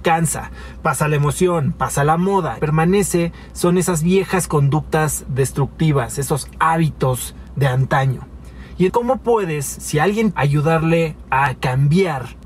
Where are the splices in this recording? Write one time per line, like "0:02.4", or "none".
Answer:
0:02.6
0:08.9
0:10.3
0:11.5